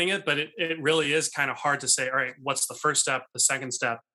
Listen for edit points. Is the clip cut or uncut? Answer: uncut